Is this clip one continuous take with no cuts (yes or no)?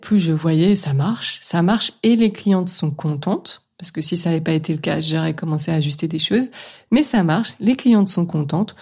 yes